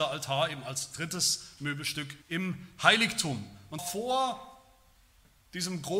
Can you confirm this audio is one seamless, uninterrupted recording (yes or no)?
no